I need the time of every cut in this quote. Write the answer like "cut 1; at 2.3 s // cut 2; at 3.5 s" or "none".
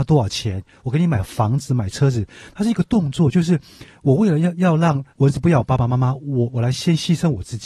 cut 1; at 5.1 s